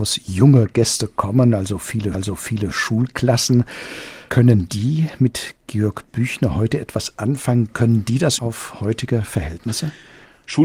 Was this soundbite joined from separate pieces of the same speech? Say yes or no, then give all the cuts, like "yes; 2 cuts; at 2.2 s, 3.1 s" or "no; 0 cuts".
yes; 2 cuts; at 2.1 s, 8.4 s